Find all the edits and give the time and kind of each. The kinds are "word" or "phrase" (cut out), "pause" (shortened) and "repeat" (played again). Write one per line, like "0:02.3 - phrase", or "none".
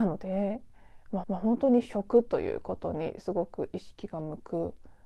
0:01.2 - repeat